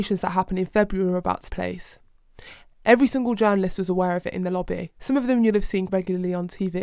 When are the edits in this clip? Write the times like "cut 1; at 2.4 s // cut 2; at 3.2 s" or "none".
cut 1; at 1.5 s // cut 2; at 5.9 s